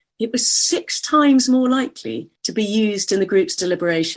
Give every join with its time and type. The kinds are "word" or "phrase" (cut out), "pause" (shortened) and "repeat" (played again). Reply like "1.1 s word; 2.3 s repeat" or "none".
2.4 s pause